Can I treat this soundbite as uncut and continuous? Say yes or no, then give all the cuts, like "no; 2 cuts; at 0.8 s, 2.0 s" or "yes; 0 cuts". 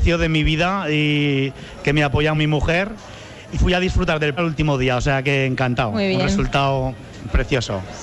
no; 3 cuts; at 2.3 s, 3.5 s, 4.4 s